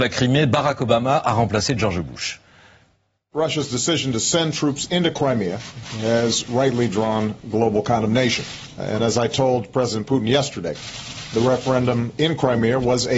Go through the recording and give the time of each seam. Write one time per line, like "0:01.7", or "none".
none